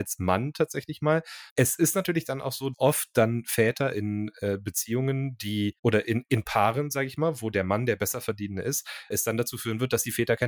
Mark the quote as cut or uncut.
cut